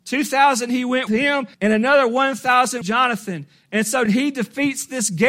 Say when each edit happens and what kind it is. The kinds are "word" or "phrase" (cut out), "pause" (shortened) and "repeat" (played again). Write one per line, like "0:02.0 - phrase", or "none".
0:01.1 - word
0:01.5 - pause
0:02.8 - phrase
0:04.1 - phrase